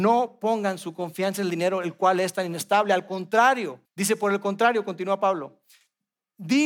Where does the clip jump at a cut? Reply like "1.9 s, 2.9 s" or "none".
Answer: 3.8 s